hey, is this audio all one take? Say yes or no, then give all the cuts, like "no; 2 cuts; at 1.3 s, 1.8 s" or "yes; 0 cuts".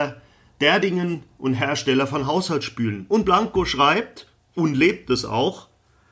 yes; 0 cuts